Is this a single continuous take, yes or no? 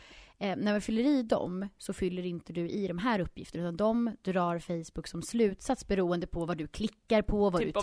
no